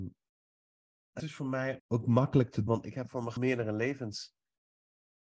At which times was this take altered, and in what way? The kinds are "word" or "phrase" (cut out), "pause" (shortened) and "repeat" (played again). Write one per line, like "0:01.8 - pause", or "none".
0:01.2 - word
0:01.8 - word
0:02.7 - word
0:03.4 - word